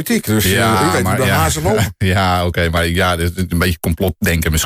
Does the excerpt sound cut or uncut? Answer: uncut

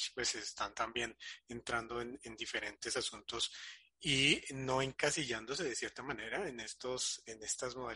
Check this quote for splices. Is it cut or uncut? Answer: uncut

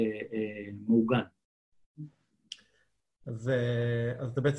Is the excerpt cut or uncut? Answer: uncut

